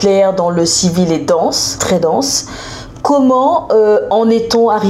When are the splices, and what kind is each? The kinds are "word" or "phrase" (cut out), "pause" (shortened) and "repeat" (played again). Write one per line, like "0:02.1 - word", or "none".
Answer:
0:01.8 - word